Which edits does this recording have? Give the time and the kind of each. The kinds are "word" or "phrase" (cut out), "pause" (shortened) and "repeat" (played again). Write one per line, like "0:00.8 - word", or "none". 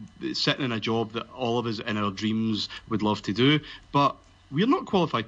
none